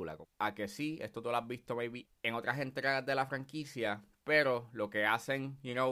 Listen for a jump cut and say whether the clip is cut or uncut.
uncut